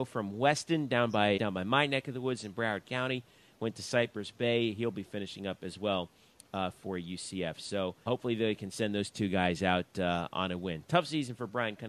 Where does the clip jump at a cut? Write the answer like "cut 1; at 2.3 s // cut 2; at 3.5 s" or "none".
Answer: cut 1; at 1.4 s // cut 2; at 8.1 s